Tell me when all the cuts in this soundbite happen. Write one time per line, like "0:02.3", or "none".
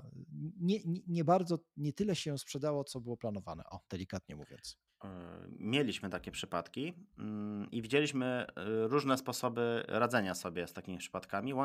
none